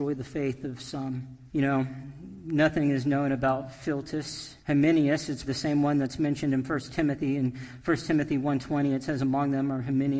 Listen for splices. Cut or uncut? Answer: cut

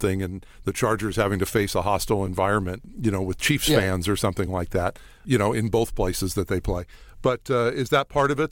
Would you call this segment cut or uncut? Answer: uncut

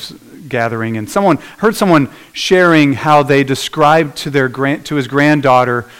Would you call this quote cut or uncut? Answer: uncut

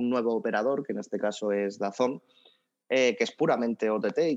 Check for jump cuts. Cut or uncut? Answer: uncut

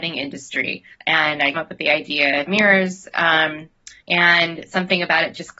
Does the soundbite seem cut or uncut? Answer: cut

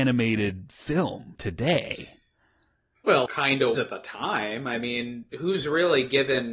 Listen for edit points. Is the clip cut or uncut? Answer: cut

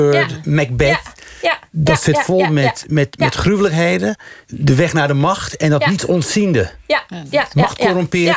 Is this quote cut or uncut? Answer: cut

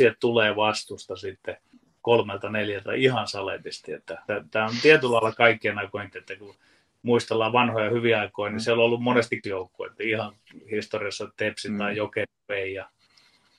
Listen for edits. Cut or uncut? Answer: cut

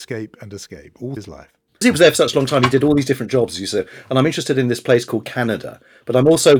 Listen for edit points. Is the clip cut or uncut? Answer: cut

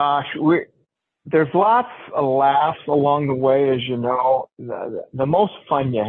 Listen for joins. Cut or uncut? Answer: uncut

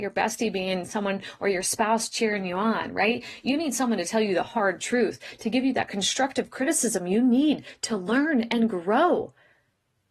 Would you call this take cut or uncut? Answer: uncut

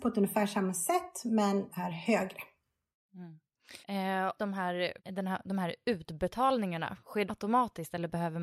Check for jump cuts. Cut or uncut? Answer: cut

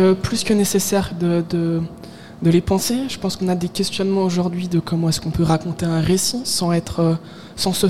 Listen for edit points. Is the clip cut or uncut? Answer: uncut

